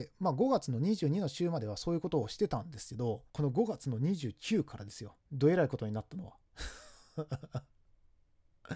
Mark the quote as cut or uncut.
cut